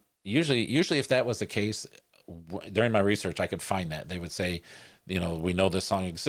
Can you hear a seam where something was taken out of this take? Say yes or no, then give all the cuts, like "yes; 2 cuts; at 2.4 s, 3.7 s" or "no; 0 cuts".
no; 0 cuts